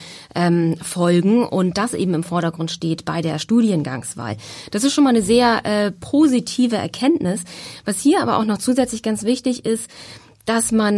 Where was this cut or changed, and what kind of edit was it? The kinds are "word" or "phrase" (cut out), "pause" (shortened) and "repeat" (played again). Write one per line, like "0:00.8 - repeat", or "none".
none